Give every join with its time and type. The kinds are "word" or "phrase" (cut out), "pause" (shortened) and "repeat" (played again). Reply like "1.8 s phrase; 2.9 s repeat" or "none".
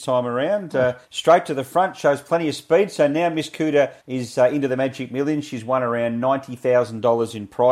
1.0 s pause; 4.0 s pause